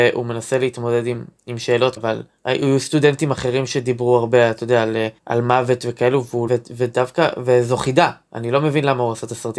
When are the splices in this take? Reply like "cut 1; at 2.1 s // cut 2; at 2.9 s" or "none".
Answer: cut 1; at 2.0 s // cut 2; at 5.2 s // cut 3; at 6.5 s